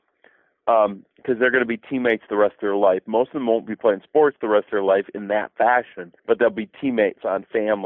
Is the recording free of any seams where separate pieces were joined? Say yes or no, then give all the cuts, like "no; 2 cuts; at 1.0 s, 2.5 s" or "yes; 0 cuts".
no; 1 cut; at 6.2 s